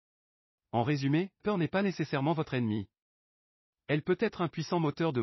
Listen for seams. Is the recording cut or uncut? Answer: cut